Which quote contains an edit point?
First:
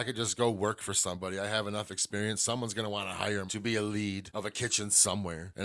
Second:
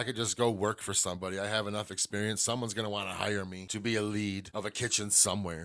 first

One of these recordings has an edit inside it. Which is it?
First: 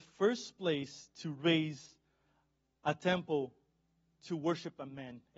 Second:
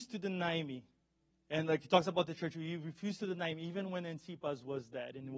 second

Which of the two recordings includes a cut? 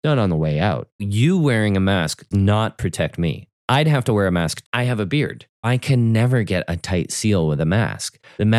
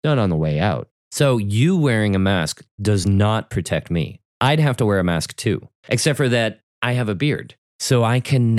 first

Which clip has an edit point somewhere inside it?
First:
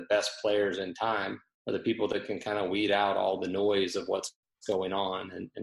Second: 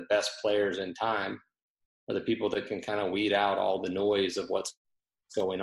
first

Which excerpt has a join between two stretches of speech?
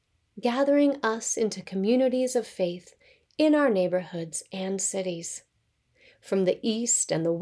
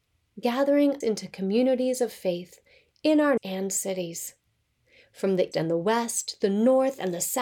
second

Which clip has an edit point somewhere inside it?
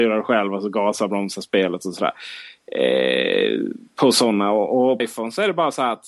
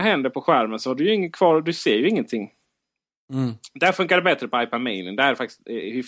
first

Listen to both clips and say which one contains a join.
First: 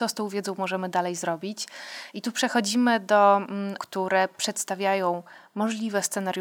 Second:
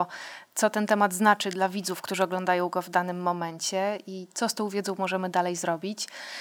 first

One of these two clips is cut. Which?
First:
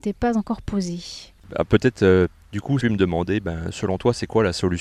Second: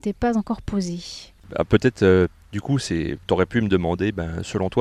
first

